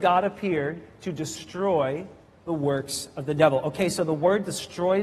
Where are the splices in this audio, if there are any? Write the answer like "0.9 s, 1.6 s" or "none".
none